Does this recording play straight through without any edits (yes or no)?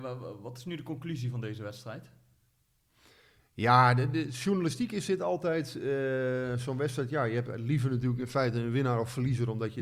yes